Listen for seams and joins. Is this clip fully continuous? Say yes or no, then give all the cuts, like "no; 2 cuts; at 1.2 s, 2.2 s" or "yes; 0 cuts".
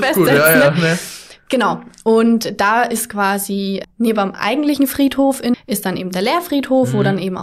no; 2 cuts; at 3.8 s, 5.5 s